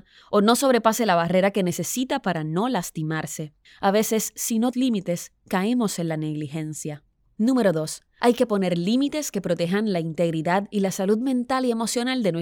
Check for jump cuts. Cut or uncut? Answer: cut